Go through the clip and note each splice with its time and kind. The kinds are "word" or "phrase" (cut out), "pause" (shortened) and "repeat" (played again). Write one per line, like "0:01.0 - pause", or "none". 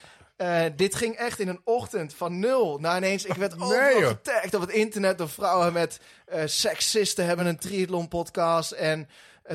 none